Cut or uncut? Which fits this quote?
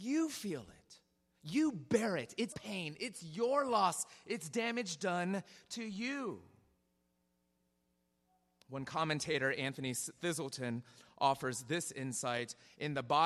cut